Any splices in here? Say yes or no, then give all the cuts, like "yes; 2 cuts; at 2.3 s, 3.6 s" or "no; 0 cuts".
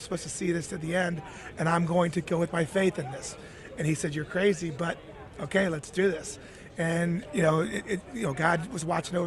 no; 0 cuts